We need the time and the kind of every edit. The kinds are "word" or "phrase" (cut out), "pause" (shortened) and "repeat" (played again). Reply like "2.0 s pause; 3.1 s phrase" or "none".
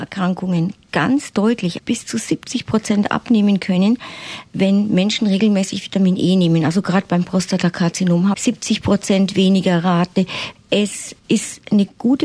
1.8 s word; 8.3 s word